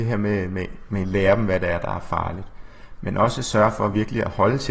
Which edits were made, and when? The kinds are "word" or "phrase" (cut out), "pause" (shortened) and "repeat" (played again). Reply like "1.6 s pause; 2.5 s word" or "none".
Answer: 1.0 s phrase